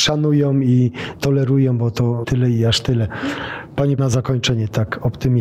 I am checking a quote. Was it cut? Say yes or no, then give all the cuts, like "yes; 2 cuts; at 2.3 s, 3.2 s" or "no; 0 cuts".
yes; 2 cuts; at 2.2 s, 4.0 s